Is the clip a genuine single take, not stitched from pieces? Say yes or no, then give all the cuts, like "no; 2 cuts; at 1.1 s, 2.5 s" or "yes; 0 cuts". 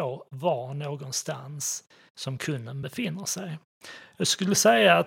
yes; 0 cuts